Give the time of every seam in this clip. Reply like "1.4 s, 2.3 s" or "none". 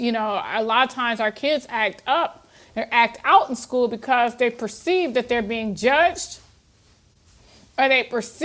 none